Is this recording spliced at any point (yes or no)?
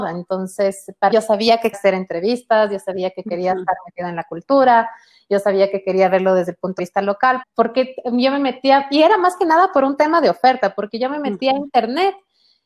yes